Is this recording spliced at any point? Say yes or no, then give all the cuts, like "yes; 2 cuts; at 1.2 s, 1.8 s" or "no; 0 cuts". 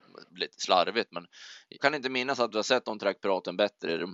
yes; 1 cut; at 1.8 s